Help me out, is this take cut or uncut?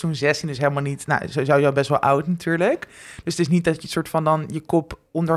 uncut